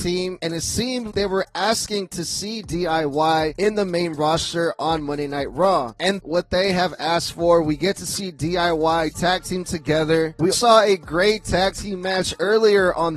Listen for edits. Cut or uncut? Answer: cut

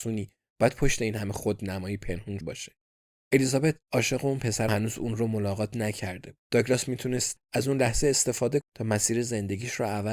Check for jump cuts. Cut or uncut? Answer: cut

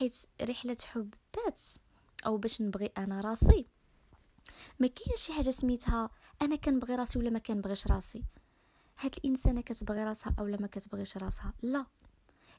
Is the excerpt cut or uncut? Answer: uncut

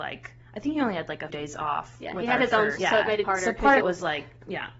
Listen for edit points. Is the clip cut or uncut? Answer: cut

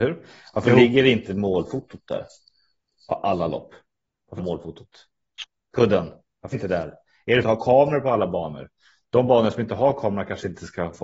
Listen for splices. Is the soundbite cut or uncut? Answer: cut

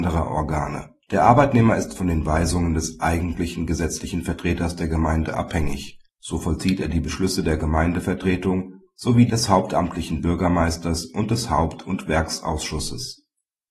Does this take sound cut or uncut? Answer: cut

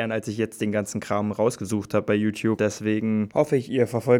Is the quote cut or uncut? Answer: cut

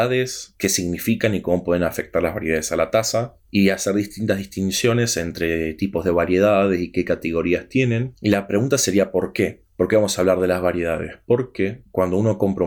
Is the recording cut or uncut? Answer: uncut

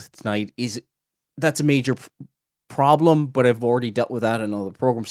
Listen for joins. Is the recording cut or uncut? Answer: uncut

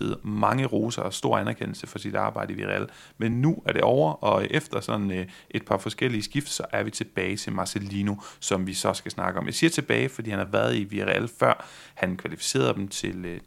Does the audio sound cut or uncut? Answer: uncut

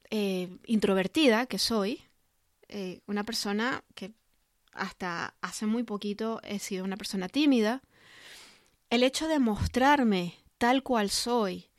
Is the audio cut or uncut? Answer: uncut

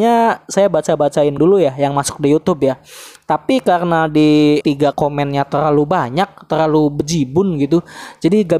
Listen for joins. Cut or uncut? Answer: cut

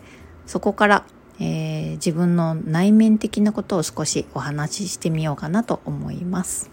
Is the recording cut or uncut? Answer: cut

